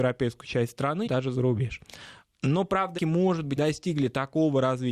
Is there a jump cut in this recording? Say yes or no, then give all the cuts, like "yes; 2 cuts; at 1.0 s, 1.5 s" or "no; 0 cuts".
yes; 3 cuts; at 1.1 s, 3.0 s, 3.6 s